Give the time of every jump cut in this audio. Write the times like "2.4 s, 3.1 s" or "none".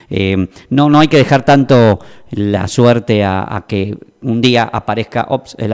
none